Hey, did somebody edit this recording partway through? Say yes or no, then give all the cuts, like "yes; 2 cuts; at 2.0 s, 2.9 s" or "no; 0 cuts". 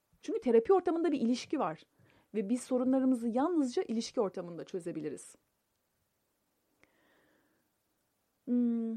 no; 0 cuts